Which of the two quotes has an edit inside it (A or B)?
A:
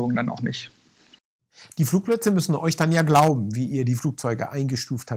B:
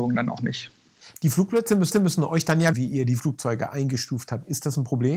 B